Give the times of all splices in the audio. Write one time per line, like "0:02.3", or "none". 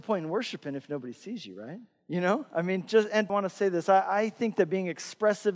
0:03.3